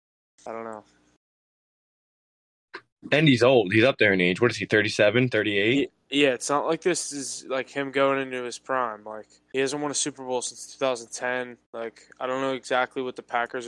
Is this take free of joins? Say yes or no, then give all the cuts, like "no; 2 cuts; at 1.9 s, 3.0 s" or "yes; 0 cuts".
no; 2 cuts; at 9.5 s, 11.6 s